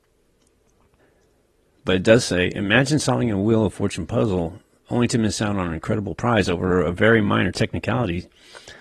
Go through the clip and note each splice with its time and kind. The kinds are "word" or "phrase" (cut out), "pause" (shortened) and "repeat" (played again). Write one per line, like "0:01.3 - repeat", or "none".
none